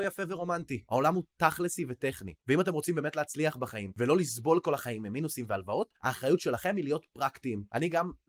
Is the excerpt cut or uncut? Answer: uncut